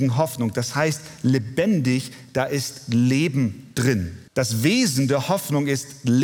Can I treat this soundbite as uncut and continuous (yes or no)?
no